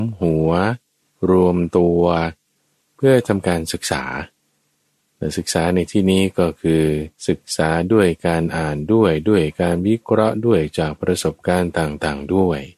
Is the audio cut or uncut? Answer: cut